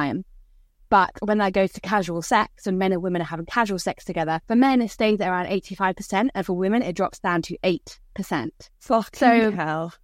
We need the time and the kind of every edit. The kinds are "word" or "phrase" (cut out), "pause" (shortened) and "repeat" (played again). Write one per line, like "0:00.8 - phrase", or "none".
0:04.4 - pause